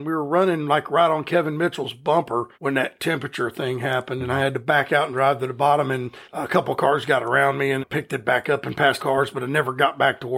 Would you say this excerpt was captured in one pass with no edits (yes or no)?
no